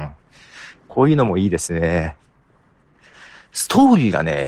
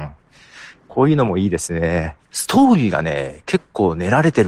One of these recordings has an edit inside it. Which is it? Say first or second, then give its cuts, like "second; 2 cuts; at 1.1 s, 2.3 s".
second; 1 cut; at 2.3 s